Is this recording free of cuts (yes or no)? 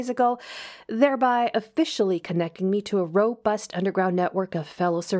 yes